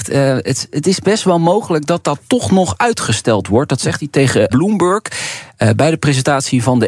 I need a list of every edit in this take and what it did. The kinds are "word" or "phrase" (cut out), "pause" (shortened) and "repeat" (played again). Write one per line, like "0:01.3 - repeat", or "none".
0:04.5 - word